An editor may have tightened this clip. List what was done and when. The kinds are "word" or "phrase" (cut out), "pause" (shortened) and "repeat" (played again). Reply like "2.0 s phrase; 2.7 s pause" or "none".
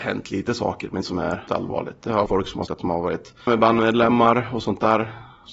1.0 s word; 1.5 s word; 2.3 s word; 2.7 s word; 3.5 s word